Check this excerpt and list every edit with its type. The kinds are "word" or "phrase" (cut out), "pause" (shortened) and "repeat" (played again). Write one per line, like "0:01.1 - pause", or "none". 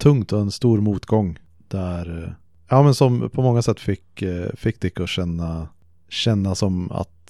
none